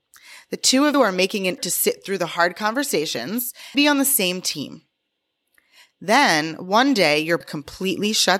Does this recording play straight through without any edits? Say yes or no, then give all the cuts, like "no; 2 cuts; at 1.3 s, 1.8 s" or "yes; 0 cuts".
no; 4 cuts; at 0.9 s, 1.6 s, 3.7 s, 7.4 s